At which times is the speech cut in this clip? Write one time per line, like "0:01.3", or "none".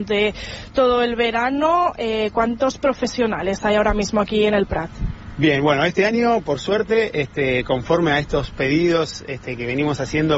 none